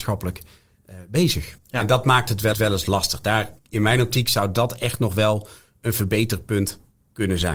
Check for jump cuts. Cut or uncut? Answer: cut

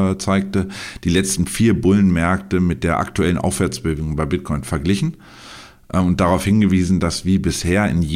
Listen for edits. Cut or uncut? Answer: uncut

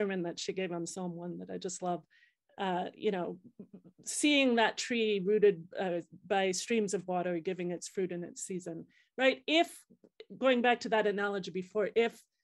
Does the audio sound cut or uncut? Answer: cut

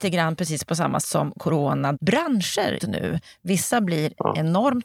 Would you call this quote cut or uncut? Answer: cut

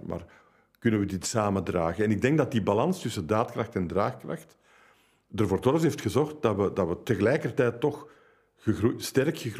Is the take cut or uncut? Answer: uncut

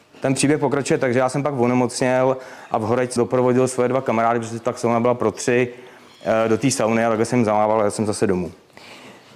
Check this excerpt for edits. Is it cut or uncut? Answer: cut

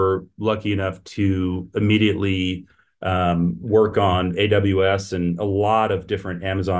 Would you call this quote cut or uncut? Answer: uncut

